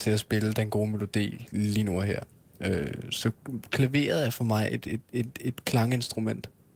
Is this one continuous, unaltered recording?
yes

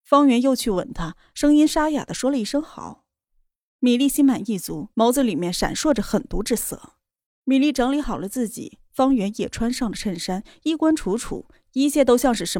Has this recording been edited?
yes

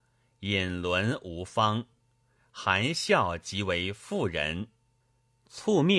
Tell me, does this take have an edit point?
no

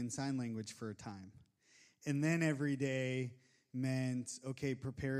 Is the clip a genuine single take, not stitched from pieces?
yes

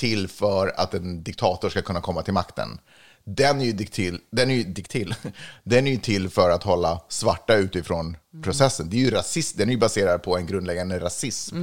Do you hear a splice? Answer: no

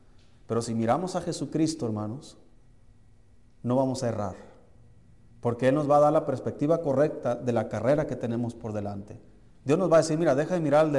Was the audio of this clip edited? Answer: no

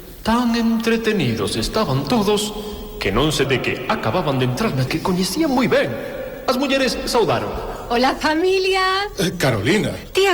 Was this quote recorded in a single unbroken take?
no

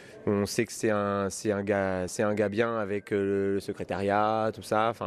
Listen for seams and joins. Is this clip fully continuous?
yes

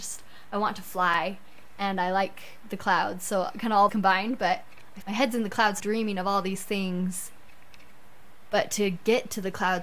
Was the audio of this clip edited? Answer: yes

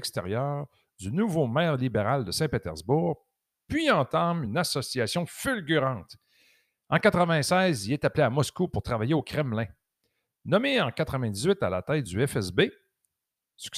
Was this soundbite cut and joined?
no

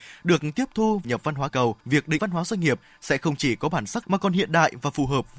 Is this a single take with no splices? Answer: no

